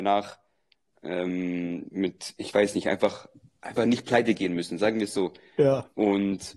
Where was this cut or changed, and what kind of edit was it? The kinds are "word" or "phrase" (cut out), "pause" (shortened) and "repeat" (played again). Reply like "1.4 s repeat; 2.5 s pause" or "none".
none